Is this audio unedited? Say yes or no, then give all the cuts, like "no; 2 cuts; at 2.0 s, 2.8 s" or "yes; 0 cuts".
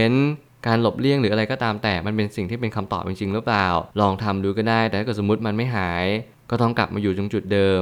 no; 1 cut; at 3.9 s